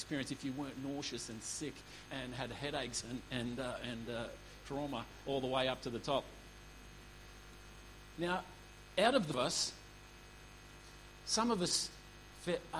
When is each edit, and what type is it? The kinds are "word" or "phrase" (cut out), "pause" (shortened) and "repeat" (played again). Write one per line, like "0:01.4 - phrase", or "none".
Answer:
0:02.1 - word
0:09.3 - phrase